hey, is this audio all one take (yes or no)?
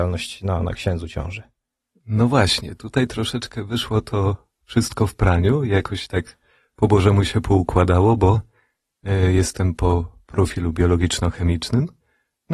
yes